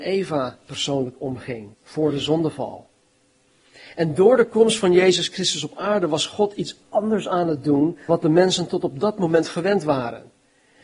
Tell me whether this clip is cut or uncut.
cut